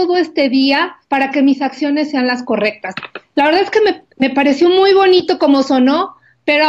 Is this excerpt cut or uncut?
cut